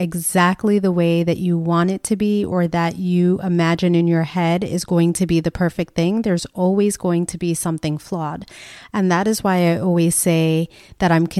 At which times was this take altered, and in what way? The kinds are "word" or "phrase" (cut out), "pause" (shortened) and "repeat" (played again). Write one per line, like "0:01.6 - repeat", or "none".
none